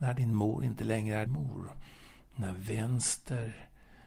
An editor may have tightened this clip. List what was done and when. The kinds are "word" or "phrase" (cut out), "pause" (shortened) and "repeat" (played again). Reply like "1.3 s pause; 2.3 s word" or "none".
1.3 s word